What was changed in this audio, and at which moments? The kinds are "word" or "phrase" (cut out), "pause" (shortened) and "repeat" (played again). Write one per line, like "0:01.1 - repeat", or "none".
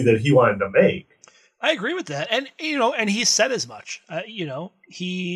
none